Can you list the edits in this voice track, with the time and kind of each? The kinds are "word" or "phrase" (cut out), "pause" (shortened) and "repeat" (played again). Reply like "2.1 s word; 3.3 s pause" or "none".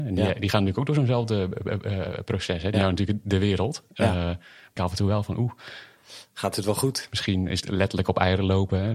2.7 s word; 4.8 s word; 7.6 s word